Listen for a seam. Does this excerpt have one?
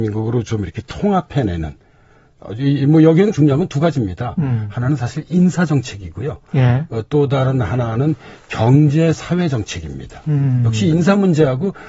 yes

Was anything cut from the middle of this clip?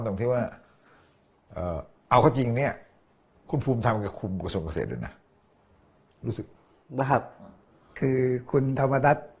no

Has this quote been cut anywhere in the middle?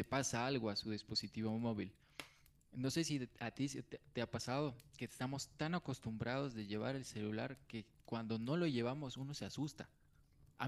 no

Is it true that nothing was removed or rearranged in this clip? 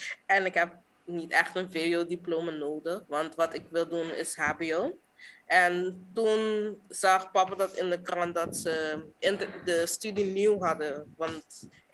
no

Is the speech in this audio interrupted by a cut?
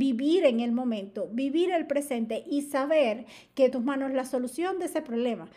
yes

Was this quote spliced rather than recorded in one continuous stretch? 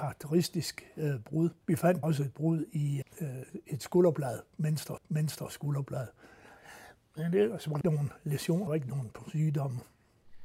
yes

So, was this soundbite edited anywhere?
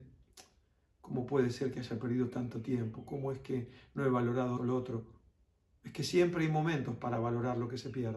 yes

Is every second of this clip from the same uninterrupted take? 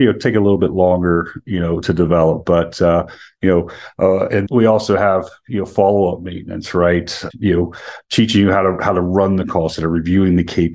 no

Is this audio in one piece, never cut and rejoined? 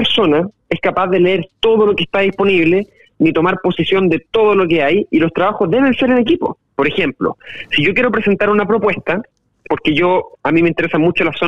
yes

